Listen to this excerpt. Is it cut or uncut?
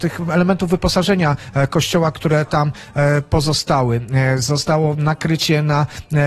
uncut